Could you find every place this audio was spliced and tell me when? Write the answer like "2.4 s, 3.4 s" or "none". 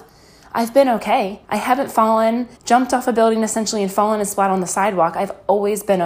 1.4 s, 2.6 s